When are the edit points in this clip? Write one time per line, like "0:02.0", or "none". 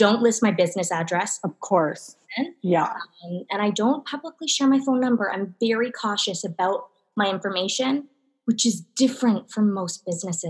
none

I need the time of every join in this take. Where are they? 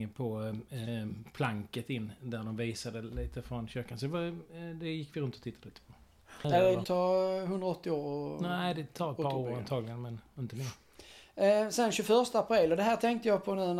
0:06.8

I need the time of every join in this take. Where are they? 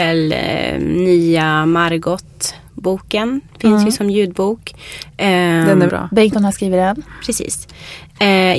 0:05.9
0:06.3

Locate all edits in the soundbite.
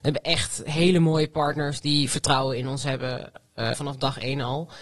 0:03.7

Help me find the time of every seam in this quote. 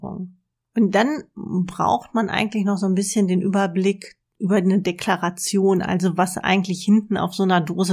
none

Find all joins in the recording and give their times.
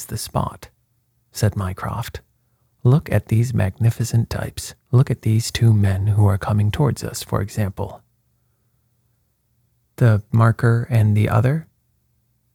0:04.8
0:10.3

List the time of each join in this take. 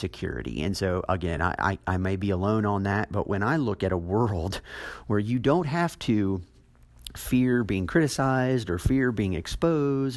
none

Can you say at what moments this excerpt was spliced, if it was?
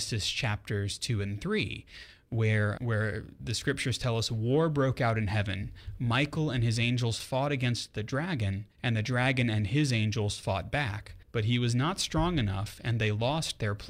0:02.8
0:08.7
0:11.2

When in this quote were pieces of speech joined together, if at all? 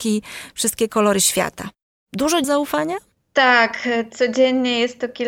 0:02.4
0:03.1

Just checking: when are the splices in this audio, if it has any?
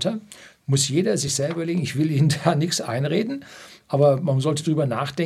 none

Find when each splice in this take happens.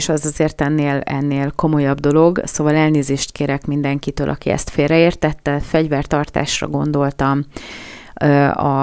none

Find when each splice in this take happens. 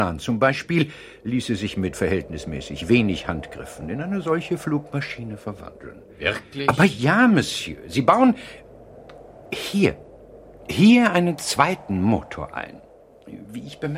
none

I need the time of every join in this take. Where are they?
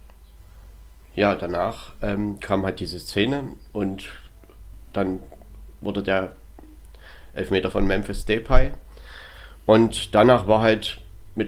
0:07.7

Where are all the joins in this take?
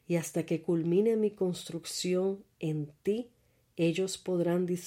none

